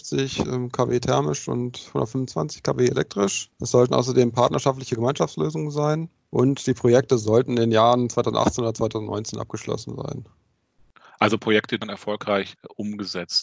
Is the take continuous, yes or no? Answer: no